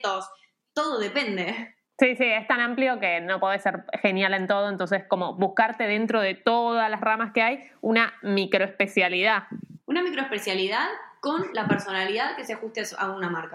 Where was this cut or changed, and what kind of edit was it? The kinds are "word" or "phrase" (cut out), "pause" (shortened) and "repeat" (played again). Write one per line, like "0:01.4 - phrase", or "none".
0:01.8 - pause
0:09.8 - pause